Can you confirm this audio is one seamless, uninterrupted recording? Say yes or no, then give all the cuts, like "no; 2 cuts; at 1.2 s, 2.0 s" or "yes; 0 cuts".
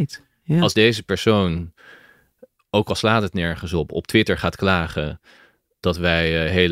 yes; 0 cuts